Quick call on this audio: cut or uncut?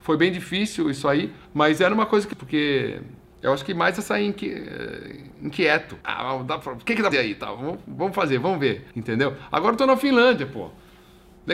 cut